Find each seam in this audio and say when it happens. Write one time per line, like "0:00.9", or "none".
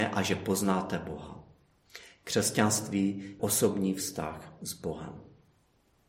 0:03.4